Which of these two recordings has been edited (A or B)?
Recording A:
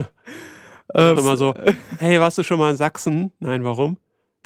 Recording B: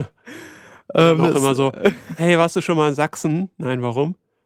A